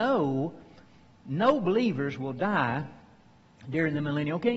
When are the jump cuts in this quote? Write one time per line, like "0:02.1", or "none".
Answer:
none